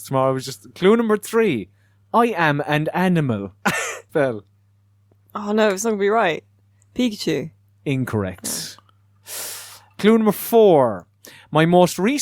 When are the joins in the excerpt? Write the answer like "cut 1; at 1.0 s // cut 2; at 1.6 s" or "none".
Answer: cut 1; at 3.6 s // cut 2; at 4.1 s